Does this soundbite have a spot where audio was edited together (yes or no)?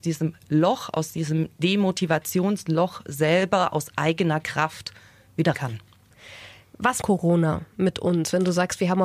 yes